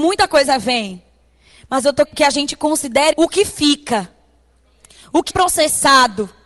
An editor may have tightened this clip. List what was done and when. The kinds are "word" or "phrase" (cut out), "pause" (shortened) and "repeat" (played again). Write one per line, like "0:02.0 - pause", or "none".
0:02.0 - word
0:03.1 - word
0:05.3 - word